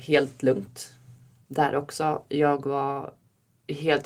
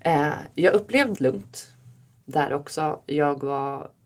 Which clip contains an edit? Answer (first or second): second